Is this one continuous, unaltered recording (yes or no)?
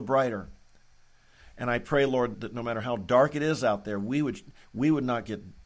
no